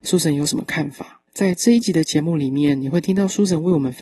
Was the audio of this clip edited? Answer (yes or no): yes